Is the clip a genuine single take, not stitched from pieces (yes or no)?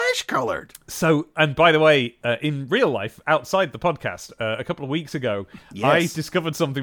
no